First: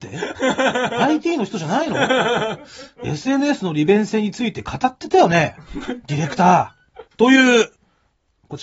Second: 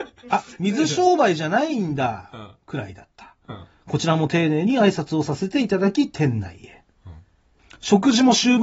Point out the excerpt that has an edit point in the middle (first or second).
first